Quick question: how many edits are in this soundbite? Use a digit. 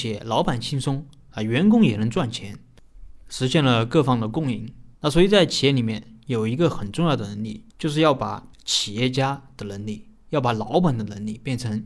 3